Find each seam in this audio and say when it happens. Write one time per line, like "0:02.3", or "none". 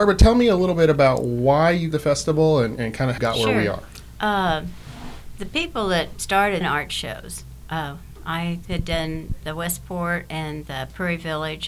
0:01.9
0:03.2
0:06.1
0:06.6